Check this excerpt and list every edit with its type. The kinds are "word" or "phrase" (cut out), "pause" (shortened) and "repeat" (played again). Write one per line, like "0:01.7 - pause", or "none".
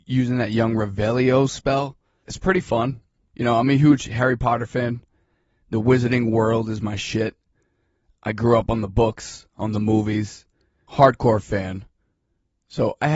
none